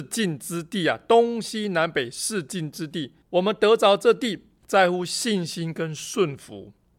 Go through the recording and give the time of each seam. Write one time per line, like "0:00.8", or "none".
0:03.2